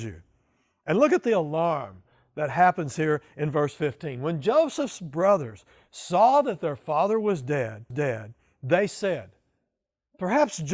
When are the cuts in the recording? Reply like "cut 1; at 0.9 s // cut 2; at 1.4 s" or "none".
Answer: cut 1; at 7.9 s